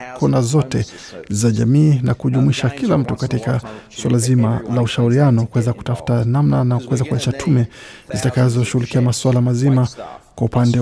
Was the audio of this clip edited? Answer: no; 0 cuts

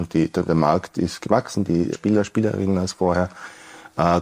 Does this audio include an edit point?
yes; 1 cut; at 1.9 s

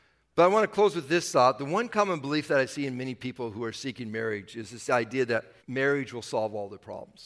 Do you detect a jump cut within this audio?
yes; 1 cut; at 5.6 s

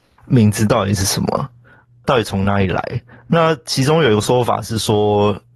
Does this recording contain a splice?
no; 0 cuts

